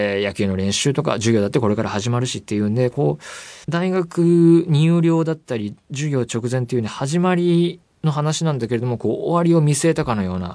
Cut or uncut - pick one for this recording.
cut